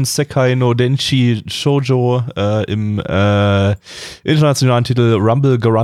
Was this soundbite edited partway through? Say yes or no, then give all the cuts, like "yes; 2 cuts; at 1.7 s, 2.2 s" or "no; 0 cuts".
no; 0 cuts